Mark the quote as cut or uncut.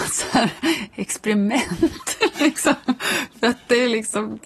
uncut